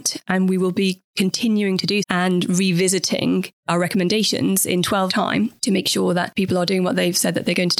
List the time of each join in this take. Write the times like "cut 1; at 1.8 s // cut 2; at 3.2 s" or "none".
cut 1; at 2.0 s // cut 2; at 3.6 s // cut 3; at 5.1 s